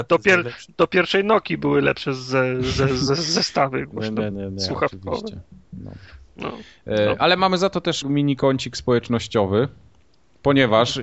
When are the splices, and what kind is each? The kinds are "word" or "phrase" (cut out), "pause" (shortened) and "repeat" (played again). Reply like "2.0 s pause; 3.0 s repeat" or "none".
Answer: 4.3 s word; 8.0 s word